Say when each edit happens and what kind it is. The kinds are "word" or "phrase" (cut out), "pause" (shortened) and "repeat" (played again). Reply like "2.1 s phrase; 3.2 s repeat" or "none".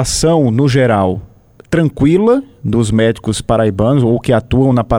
none

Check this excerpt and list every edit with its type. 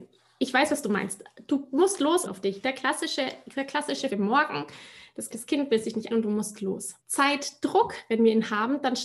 2.3 s phrase; 4.1 s word; 5.3 s word; 6.1 s word; 7.0 s pause

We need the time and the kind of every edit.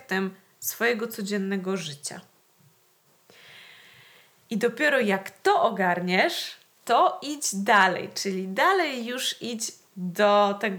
none

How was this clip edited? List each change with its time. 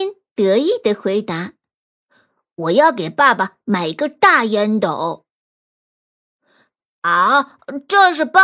none

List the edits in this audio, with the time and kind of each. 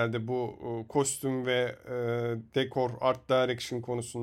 none

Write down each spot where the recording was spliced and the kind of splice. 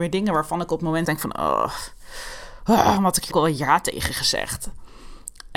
1.0 s word; 3.0 s word; 3.3 s word

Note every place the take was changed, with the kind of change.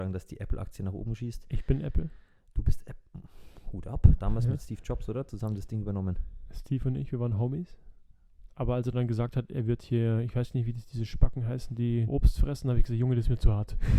12.1 s word

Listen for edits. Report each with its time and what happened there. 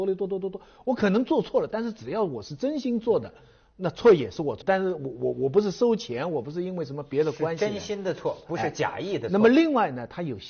4.6 s word

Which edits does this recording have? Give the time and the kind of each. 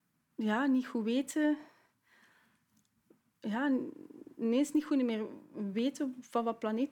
none

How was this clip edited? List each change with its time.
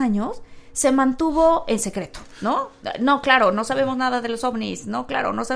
2.3 s pause

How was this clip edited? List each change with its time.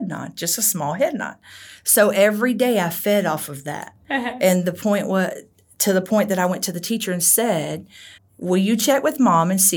8.2 s word

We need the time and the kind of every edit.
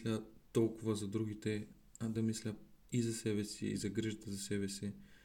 none

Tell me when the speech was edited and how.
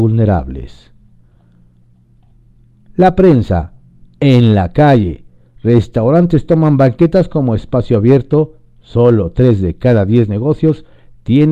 none

